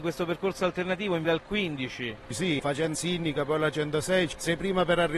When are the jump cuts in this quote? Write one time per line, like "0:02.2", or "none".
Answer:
0:01.2
0:02.9

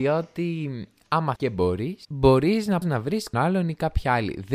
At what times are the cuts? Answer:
0:01.4
0:02.8
0:03.3

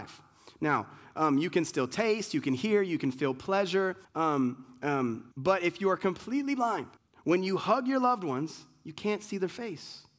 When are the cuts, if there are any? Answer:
0:04.0
0:05.3
0:07.0

